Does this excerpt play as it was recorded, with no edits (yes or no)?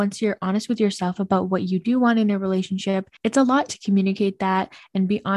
no